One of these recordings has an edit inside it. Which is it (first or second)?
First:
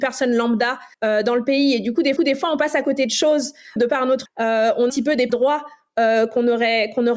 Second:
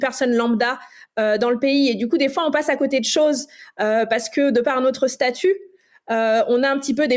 first